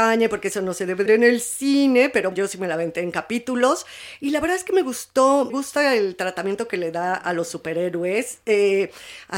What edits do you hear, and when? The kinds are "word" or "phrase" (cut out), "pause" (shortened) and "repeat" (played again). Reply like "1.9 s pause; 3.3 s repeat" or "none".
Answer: 1.1 s word; 2.3 s word; 5.5 s word

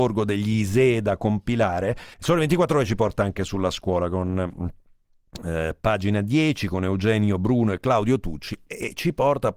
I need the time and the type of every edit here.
2.1 s pause

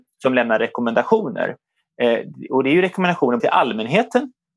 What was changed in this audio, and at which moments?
3.4 s word

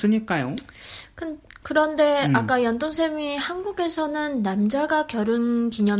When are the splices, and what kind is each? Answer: none

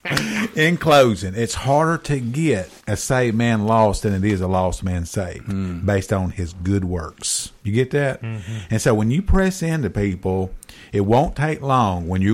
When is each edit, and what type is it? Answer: 2.8 s pause; 7.6 s pause

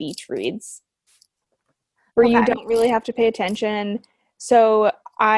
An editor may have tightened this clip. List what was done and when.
none

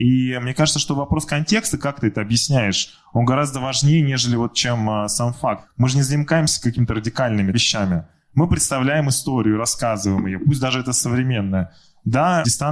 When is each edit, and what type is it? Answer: none

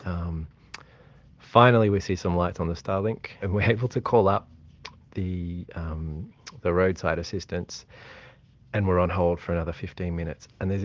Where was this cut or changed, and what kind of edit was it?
3.4 s word; 5.0 s word

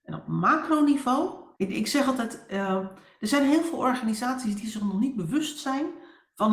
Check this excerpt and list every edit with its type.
1.5 s pause

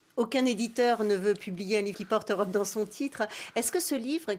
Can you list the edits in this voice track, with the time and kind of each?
none

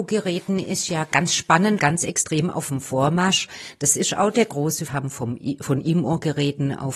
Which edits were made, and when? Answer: 1.8 s word; 4.9 s phrase

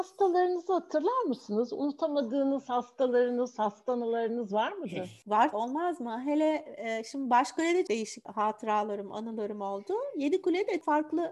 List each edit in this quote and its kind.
5.5 s word; 7.9 s phrase

